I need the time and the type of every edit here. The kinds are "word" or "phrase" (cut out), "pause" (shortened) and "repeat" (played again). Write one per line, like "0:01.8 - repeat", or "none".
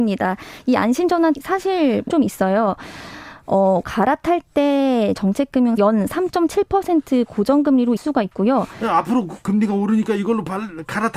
0:01.3 - word
0:02.1 - word
0:03.8 - word
0:05.2 - word
0:05.8 - phrase
0:08.0 - word